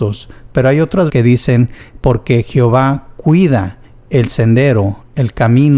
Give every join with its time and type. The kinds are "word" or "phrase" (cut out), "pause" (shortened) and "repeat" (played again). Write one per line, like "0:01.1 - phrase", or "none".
0:01.1 - word